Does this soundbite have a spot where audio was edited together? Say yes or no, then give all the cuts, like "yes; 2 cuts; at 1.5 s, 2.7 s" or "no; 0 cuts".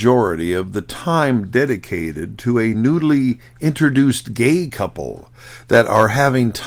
no; 0 cuts